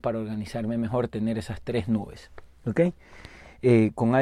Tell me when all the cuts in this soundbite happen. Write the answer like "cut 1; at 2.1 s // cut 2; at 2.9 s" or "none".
none